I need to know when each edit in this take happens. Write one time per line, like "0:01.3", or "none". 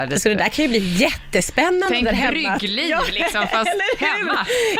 none